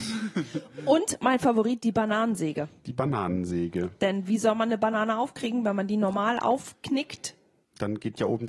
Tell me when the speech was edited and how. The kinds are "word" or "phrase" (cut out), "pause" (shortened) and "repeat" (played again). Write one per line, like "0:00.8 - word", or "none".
none